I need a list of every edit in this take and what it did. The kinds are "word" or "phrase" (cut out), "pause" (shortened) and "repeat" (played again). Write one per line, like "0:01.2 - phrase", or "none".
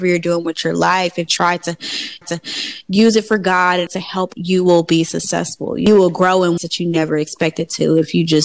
0:01.3 - word
0:02.2 - repeat
0:03.9 - word
0:04.3 - word
0:06.6 - word